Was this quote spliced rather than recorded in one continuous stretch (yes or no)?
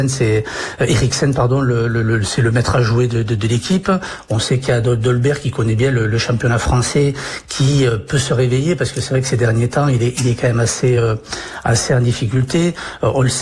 no